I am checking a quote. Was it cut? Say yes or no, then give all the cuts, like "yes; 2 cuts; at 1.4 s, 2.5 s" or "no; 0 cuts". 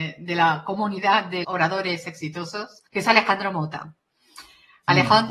yes; 2 cuts; at 1.4 s, 2.9 s